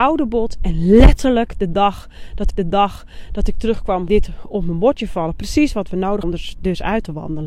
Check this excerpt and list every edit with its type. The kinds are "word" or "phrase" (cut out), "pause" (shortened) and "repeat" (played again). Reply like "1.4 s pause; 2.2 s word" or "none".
2.5 s repeat; 4.1 s word; 6.2 s word